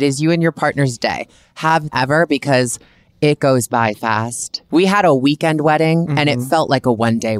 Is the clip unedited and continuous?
no; 2 cuts; at 1.9 s, 3.9 s

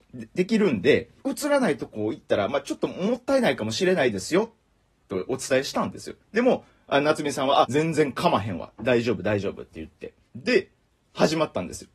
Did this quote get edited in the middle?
yes; 4 cuts; at 1.2 s, 6.2 s, 7.6 s, 10.3 s

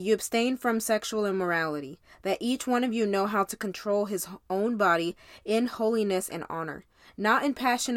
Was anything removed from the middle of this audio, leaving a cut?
no; 0 cuts

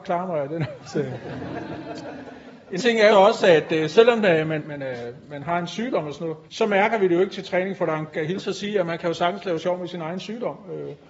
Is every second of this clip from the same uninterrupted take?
no; 5 cuts; at 2.8 s, 3.1 s, 4.6 s, 6.5 s, 8.1 s

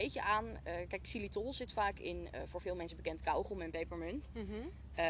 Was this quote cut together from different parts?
no; 0 cuts

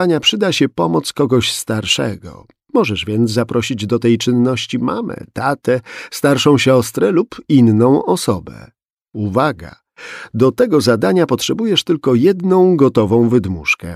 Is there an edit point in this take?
no; 0 cuts

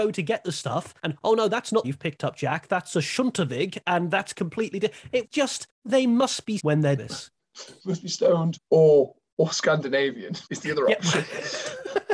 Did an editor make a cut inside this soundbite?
yes; 8 cuts; at 1.0 s, 1.8 s, 5.2 s, 5.7 s, 6.6 s, 7.0 s, 8.6 s, 10.5 s

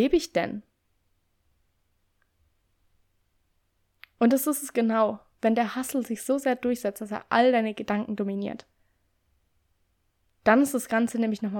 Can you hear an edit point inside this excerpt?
no; 0 cuts

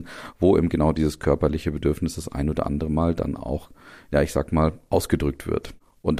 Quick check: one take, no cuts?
yes; 0 cuts

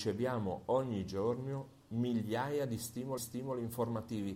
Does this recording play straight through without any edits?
no; 1 cut; at 3.2 s

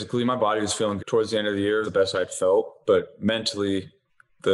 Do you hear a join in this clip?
yes; 3 cuts; at 1.0 s, 1.8 s, 2.8 s

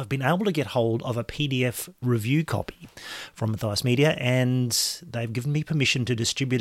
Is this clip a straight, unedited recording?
yes; 0 cuts

